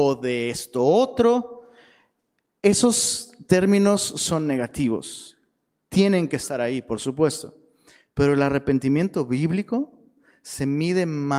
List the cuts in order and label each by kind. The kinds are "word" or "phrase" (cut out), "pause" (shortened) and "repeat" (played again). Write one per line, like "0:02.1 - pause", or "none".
none